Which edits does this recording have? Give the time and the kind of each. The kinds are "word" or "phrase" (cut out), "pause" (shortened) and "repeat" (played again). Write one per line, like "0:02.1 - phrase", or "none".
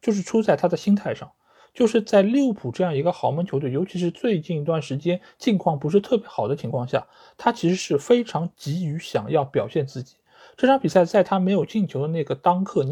none